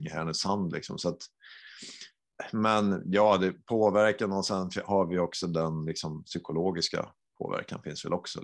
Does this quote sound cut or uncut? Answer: uncut